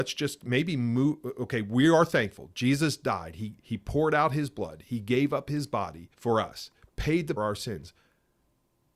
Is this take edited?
yes; 3 cuts; at 3.6 s, 6.1 s, 7.4 s

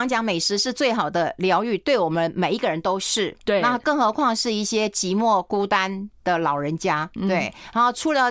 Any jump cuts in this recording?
yes; 1 cut; at 7.2 s

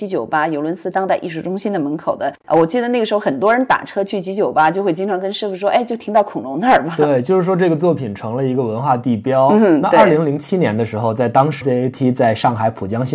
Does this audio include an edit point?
yes; 1 cut; at 11.6 s

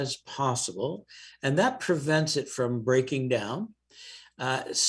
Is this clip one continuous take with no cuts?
yes; 0 cuts

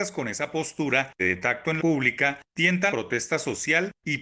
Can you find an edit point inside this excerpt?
yes; 3 cuts; at 1.2 s, 1.8 s, 2.9 s

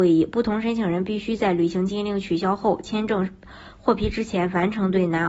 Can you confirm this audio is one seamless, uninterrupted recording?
yes; 0 cuts

